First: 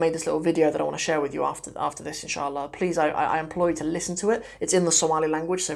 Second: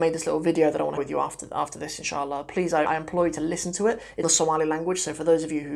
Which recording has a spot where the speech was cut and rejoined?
second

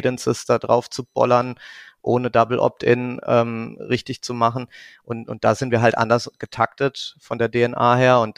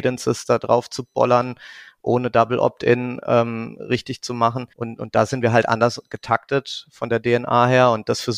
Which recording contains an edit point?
second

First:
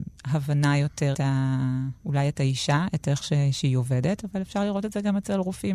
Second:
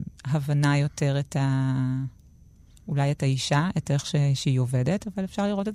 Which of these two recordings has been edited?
first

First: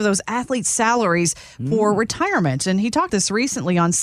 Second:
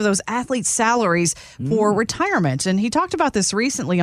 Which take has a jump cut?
first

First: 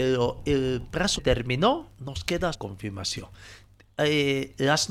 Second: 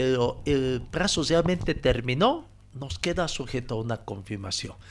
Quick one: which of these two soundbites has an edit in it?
first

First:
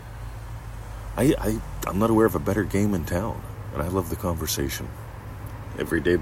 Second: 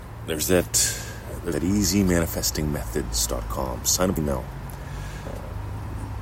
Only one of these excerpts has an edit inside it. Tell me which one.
second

